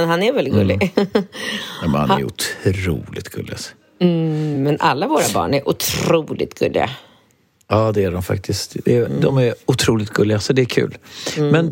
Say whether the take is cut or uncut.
uncut